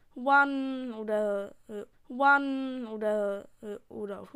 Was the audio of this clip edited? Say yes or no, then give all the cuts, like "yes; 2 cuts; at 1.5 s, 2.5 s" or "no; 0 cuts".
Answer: yes; 1 cut; at 1.9 s